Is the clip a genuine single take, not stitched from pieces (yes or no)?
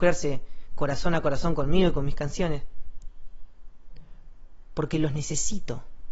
yes